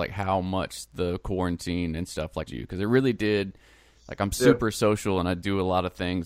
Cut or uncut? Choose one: cut